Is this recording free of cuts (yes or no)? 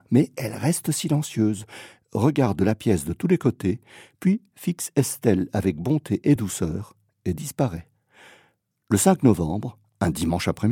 yes